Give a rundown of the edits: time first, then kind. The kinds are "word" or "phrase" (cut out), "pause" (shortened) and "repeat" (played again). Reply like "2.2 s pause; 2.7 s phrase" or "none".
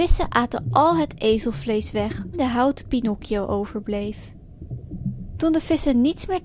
2.3 s phrase